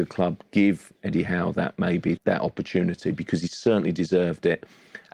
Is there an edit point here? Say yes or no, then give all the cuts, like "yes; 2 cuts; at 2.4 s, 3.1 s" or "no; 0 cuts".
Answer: yes; 1 cut; at 2.2 s